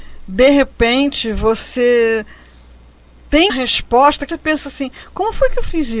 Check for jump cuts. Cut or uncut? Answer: cut